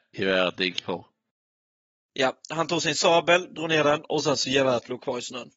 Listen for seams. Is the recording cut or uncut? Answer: uncut